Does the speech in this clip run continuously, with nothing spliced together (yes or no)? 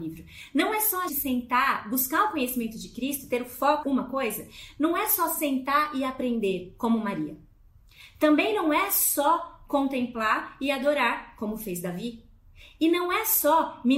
no